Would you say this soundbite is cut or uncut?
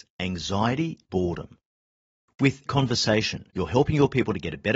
cut